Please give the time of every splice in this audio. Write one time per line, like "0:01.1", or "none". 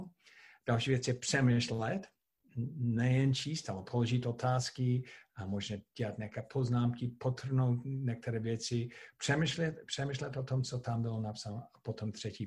none